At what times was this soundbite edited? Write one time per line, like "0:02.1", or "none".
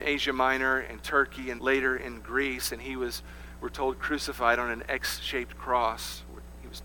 0:01.6